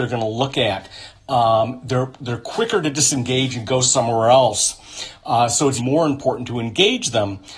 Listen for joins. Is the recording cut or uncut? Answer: cut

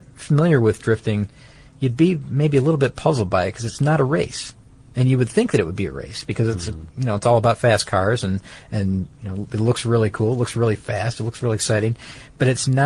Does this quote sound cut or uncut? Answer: uncut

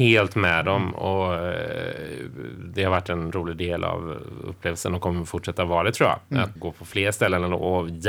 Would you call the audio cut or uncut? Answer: cut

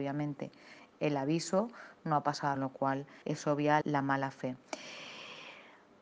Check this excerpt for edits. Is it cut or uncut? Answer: cut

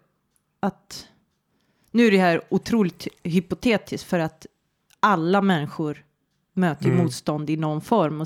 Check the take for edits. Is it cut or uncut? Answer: uncut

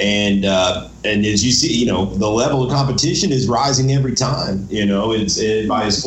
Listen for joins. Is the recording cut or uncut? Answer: uncut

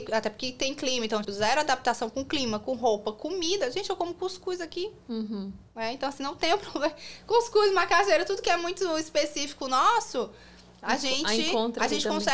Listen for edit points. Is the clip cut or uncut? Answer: cut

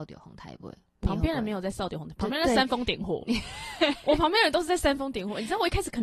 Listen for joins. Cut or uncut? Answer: cut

